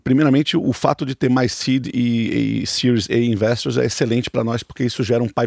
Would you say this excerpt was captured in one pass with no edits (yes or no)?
yes